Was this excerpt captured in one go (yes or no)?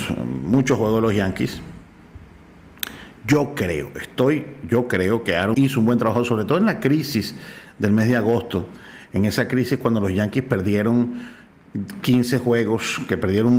no